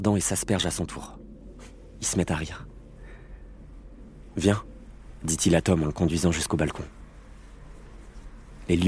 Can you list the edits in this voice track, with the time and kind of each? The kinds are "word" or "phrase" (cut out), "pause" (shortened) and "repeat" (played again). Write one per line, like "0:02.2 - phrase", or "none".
none